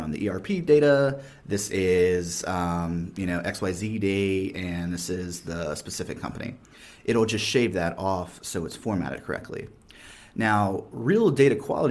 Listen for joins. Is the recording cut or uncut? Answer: uncut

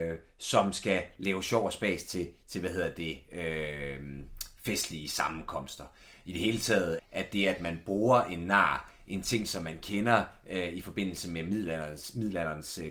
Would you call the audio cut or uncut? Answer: cut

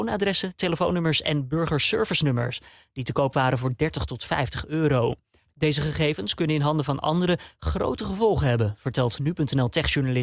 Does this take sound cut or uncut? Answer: uncut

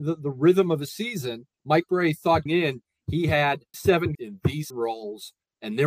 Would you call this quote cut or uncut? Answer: cut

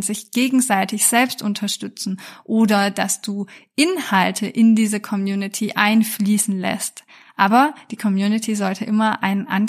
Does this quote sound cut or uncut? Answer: uncut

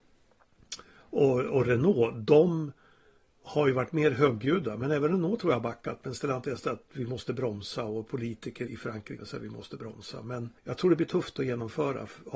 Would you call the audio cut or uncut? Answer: cut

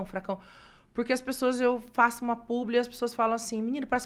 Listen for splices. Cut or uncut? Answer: uncut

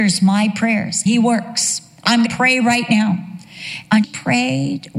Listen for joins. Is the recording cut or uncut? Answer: cut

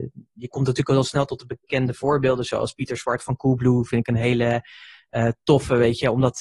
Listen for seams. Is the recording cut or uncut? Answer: uncut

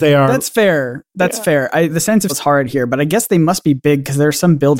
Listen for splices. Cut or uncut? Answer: cut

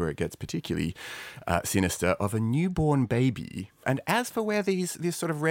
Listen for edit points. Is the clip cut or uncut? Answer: uncut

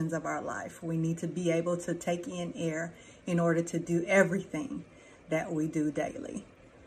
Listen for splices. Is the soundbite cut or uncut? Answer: uncut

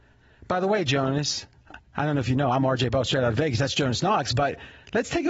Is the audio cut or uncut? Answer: cut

